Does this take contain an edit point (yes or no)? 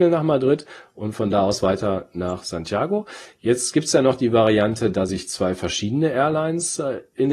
no